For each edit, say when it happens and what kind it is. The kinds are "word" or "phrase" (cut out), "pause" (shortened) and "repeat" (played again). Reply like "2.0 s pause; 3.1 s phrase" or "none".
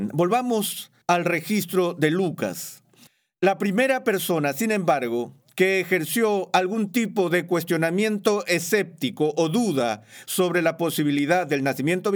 1.0 s pause; 3.1 s pause